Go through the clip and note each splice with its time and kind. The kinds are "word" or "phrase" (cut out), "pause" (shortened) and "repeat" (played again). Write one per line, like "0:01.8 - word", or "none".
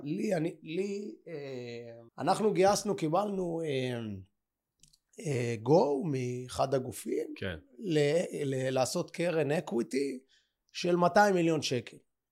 0:02.1 - pause